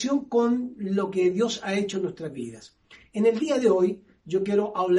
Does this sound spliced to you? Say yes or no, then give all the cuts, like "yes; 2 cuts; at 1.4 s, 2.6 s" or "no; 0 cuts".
no; 0 cuts